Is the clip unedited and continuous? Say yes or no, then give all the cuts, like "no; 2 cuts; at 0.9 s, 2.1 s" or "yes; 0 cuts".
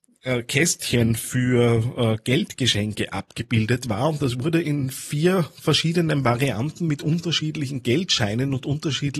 yes; 0 cuts